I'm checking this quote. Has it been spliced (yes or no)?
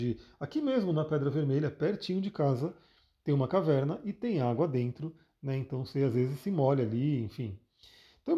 no